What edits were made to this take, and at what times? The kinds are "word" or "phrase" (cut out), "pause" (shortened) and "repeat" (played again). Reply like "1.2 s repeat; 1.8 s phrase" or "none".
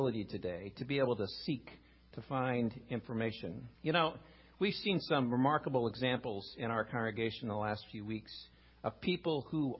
3.7 s pause

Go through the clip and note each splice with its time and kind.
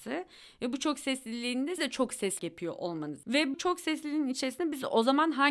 1.8 s word; 2.4 s word; 3.5 s word

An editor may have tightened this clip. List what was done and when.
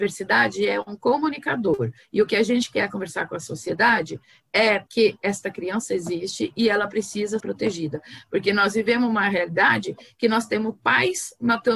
4.9 s pause; 7.4 s word

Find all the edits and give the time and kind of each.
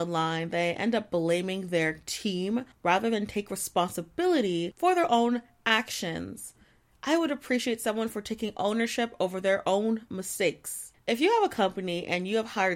none

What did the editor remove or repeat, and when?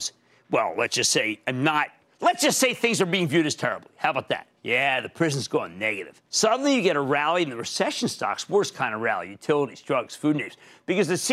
2.0 s pause; 4.6 s pause; 6.3 s pause

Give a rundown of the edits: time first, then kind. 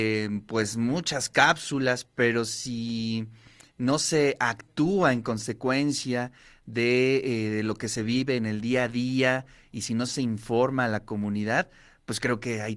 none

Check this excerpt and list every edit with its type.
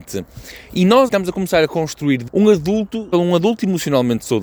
1.1 s word; 2.3 s word; 3.1 s word

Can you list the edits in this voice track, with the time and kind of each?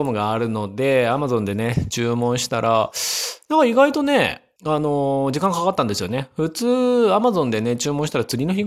4.6 s pause

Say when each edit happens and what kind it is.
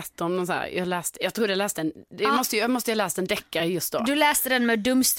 none

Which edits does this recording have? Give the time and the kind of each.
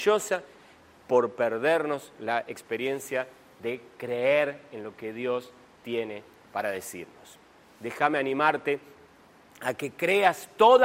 none

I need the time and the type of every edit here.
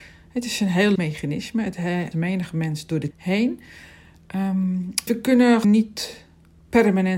1.0 s word; 2.1 s word; 3.1 s word; 5.1 s word; 5.6 s word

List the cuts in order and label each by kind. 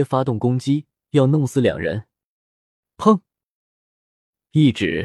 none

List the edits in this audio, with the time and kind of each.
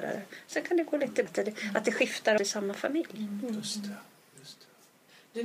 1.3 s word; 2.4 s word

